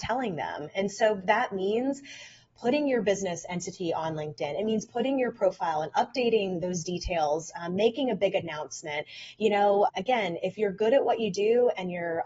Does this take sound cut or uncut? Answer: cut